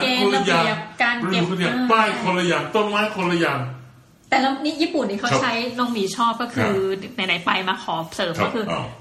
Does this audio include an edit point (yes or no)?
no